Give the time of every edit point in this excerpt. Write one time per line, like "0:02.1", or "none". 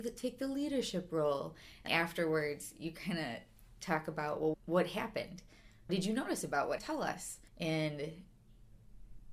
0:01.9
0:04.5
0:05.9
0:06.8
0:07.5